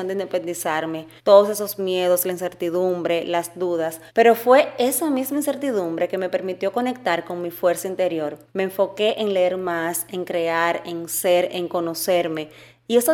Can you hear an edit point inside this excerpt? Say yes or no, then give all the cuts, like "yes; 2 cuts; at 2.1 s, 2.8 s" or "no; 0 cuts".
yes; 3 cuts; at 1.2 s, 4.1 s, 8.5 s